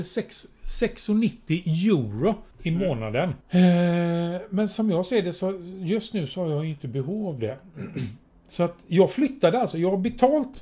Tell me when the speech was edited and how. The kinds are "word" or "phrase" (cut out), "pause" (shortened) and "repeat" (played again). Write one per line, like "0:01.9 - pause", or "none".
0:02.5 - pause
0:03.4 - pause